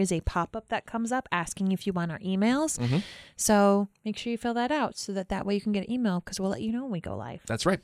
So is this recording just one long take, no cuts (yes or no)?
yes